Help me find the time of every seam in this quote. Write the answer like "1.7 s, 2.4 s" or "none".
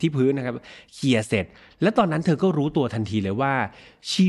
none